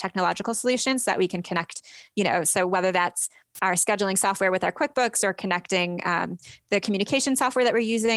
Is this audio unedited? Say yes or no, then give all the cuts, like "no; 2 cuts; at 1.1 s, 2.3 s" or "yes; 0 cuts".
yes; 0 cuts